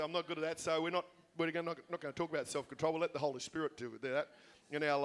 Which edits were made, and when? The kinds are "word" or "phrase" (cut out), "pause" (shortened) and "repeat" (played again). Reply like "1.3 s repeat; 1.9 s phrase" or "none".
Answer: none